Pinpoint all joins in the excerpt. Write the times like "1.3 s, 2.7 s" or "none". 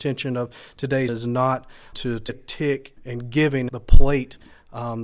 1.1 s, 1.9 s, 2.3 s, 3.0 s, 3.7 s